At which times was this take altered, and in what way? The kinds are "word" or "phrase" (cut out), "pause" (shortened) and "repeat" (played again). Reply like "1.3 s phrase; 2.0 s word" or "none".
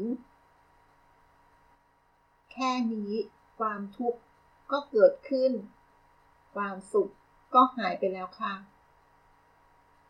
none